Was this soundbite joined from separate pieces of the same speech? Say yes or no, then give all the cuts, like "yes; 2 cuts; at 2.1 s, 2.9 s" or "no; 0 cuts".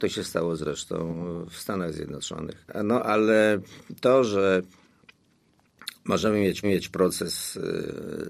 yes; 1 cut; at 6.6 s